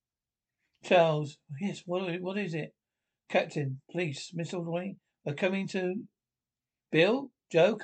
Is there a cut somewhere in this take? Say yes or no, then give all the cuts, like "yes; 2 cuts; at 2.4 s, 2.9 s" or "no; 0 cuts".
no; 0 cuts